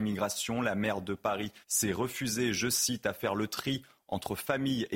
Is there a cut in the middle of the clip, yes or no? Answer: yes